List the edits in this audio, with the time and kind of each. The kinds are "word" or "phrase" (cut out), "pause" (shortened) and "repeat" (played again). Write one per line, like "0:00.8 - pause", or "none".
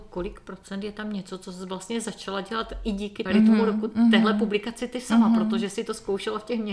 0:03.3 - word